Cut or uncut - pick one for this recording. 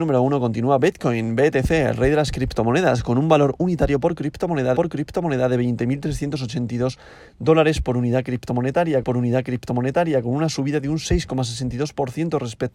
cut